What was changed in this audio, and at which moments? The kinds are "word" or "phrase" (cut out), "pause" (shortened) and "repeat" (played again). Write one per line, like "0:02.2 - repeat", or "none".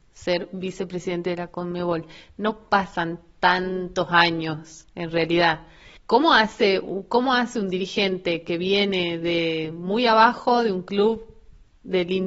0:06.0 - pause